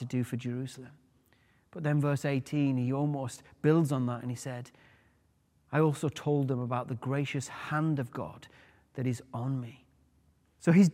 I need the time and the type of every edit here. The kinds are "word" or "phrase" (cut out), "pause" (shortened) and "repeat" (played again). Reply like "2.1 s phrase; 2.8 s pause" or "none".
none